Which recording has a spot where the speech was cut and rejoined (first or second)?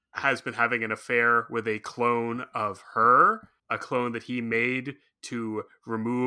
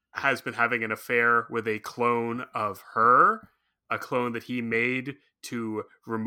first